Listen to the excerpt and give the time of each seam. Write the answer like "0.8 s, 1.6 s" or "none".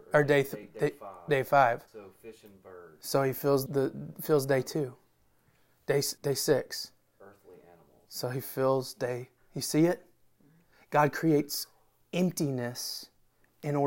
1.9 s, 3.7 s, 6.2 s